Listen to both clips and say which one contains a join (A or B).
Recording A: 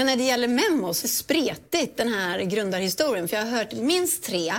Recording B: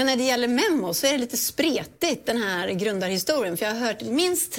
A